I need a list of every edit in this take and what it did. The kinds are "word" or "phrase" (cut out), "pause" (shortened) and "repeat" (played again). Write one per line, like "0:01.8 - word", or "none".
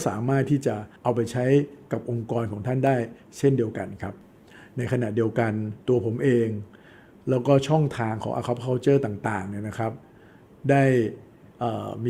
0:01.0 - pause
0:05.8 - pause